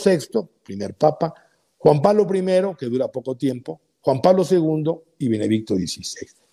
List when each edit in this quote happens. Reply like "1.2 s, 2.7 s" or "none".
none